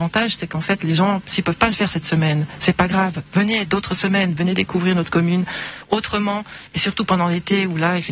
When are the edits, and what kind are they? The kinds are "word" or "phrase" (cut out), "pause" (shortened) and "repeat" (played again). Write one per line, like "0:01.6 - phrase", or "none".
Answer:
none